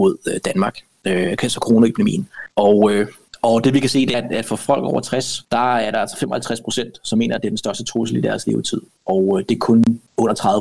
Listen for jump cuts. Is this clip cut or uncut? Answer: cut